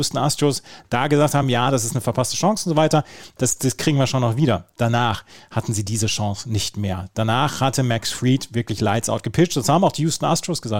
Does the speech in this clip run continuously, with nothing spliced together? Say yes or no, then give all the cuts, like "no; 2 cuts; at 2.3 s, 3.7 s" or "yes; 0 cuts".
yes; 0 cuts